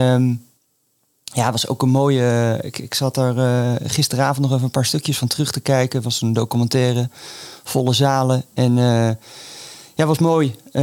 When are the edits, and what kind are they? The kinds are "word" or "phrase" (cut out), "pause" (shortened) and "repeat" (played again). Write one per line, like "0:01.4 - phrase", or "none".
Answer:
none